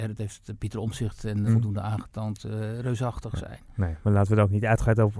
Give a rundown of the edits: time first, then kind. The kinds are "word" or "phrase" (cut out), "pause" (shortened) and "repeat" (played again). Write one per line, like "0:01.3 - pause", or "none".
0:01.5 - phrase